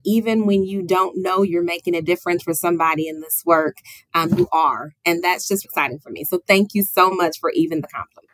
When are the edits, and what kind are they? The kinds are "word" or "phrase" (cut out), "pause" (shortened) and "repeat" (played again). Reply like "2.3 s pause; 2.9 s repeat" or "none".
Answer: 5.6 s word